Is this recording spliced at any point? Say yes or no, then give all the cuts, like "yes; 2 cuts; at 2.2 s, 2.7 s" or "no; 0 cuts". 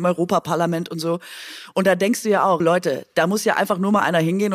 yes; 1 cut; at 2.6 s